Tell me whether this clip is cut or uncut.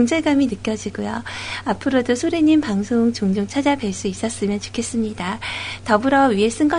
uncut